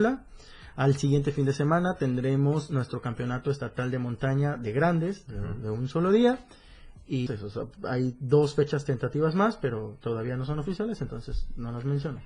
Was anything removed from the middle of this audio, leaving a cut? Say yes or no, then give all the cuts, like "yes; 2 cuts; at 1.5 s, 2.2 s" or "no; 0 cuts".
yes; 1 cut; at 7.3 s